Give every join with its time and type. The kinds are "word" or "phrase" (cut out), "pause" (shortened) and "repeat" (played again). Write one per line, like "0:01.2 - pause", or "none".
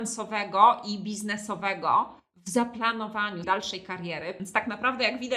0:03.4 - word